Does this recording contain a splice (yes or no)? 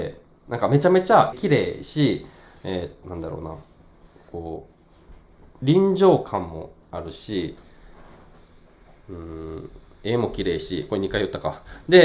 yes